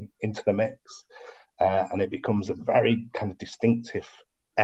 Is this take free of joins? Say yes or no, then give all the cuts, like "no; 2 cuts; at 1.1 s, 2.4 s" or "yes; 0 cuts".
yes; 0 cuts